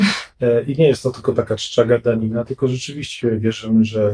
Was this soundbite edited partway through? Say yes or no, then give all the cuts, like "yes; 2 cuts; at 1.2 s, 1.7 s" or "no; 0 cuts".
no; 0 cuts